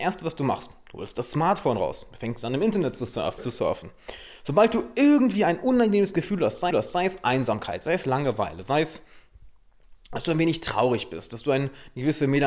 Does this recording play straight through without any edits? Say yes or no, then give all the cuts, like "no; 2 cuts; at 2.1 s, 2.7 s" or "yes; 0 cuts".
no; 2 cuts; at 3.4 s, 6.7 s